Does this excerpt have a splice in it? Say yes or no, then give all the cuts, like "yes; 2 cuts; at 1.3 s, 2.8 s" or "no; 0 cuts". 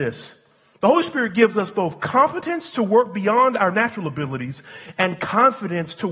no; 0 cuts